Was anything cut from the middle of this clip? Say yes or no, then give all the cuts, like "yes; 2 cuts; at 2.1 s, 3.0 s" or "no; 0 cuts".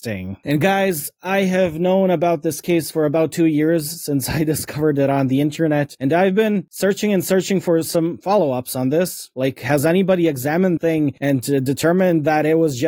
yes; 1 cut; at 10.8 s